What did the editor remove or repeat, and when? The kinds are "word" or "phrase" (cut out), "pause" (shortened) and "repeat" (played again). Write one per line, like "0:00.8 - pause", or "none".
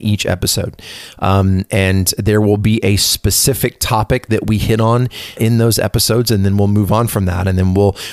0:05.4 - word

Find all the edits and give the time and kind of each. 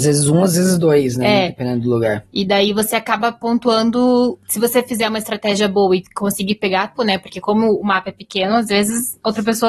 0:07.0 - word

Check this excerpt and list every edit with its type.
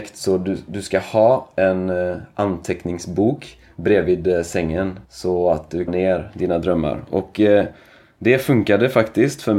0:05.0 - pause
0:05.9 - phrase

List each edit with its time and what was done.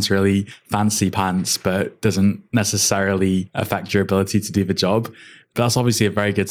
none

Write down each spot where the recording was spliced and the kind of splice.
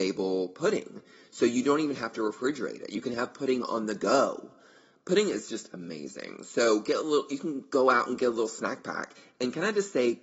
none

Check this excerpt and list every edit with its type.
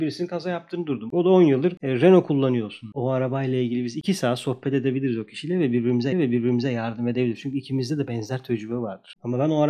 0:06.1 - repeat

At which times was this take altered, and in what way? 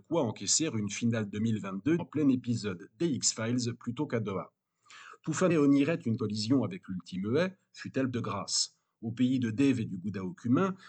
0:02.0 - word
0:05.5 - word
0:06.2 - word
0:08.1 - word

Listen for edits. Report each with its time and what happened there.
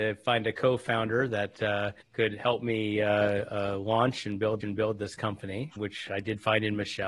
0:02.0 - pause
0:04.6 - repeat
0:05.8 - word

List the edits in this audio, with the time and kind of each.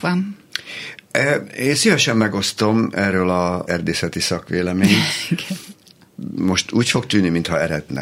0:03.7 - word

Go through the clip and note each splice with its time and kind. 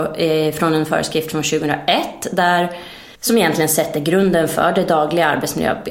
0:03.1 - pause

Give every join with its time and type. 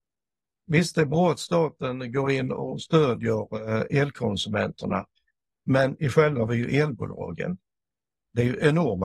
0:06.5 - phrase

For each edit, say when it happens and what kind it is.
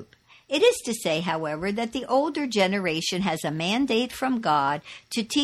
none

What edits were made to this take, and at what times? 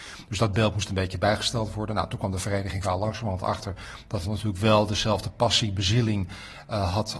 0:02.8 - word
0:04.2 - word

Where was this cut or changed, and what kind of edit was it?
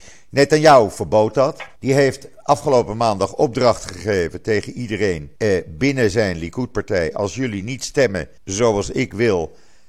0:01.8 - pause
0:05.4 - pause
0:08.4 - pause

